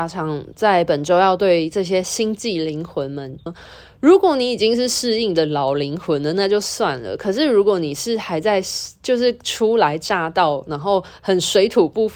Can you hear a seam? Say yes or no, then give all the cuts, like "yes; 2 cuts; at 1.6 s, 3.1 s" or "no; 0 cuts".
yes; 1 cut; at 3.5 s